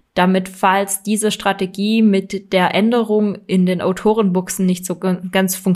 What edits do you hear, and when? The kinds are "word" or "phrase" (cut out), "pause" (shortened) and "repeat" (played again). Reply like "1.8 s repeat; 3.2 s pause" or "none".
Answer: none